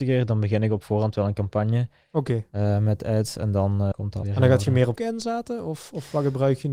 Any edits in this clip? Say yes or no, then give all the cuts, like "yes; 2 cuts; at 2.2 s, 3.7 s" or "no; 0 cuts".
yes; 3 cuts; at 3.9 s, 4.2 s, 5.0 s